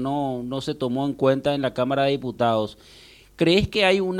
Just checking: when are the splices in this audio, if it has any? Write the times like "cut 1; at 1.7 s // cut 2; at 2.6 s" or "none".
none